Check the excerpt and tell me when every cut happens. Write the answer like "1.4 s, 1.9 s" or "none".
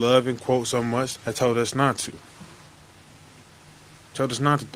1.2 s